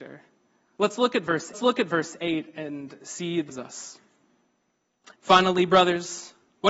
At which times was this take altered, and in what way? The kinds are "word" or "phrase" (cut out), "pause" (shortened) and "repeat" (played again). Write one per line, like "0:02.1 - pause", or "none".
0:01.5 - repeat
0:03.5 - phrase
0:05.1 - pause